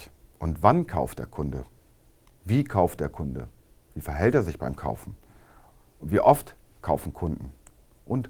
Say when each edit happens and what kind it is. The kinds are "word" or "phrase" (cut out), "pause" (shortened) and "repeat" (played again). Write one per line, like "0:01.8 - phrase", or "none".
none